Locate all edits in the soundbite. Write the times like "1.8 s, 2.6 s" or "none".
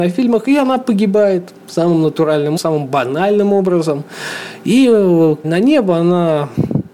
2.6 s, 5.4 s